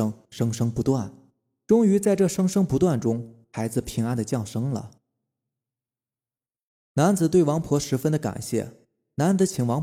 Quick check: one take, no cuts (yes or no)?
yes